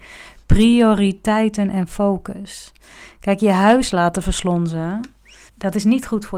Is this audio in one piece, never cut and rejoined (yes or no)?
no